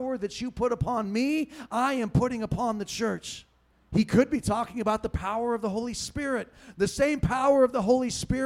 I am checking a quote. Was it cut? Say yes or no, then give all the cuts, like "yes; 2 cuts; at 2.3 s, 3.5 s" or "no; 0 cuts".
yes; 1 cut; at 3.7 s